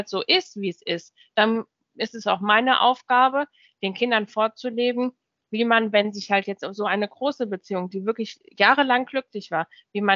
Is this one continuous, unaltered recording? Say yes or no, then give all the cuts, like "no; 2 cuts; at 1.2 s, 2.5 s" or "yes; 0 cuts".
yes; 0 cuts